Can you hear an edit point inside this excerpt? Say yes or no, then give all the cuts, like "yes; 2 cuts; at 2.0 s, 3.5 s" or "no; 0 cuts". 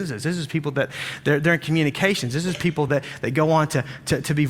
no; 0 cuts